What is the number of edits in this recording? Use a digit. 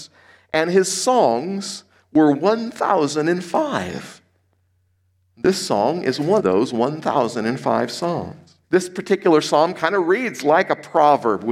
2